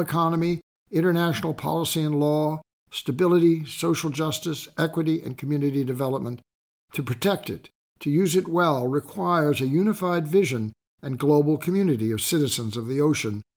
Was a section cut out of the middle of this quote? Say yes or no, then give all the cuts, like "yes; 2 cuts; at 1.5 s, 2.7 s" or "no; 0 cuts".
no; 0 cuts